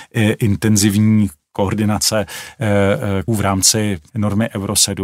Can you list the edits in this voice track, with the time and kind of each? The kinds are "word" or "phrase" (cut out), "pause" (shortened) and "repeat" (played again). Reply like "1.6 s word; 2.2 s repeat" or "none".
1.4 s word; 3.3 s word; 4.1 s word